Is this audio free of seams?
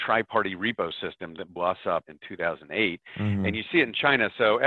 no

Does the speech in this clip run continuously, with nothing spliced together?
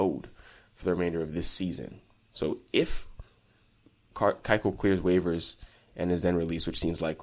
yes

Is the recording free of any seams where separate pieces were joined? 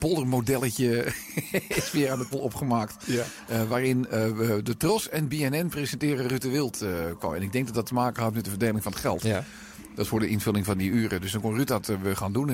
no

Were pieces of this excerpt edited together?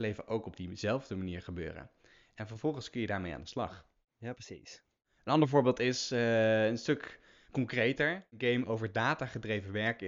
no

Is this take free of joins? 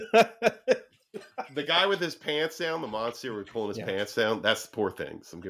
yes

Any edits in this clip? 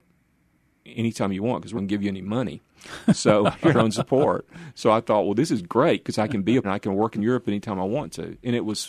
yes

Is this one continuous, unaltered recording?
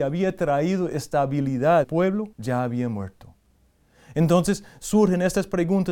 no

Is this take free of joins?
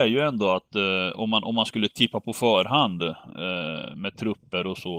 yes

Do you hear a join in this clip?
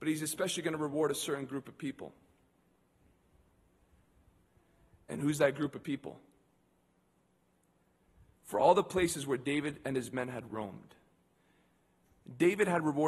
no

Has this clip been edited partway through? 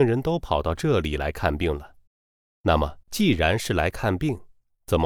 yes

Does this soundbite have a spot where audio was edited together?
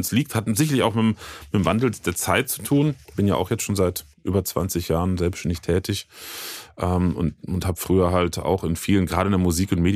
yes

